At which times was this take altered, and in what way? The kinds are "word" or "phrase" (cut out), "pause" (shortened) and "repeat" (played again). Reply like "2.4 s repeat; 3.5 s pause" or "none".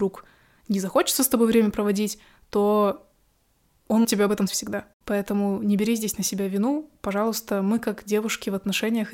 4.0 s word; 4.5 s word